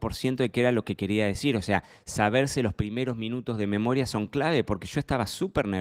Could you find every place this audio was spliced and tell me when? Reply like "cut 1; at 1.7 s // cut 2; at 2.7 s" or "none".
none

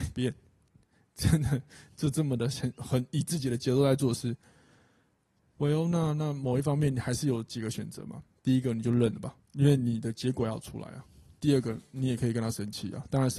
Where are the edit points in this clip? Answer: cut 1; at 9.4 s

